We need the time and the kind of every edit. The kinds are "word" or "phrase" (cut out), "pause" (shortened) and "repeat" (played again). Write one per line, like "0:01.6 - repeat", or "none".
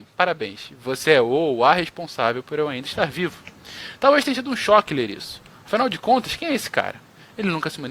none